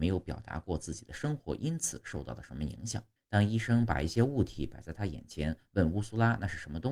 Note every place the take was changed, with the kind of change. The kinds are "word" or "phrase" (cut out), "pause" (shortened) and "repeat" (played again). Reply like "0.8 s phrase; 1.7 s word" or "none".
3.2 s pause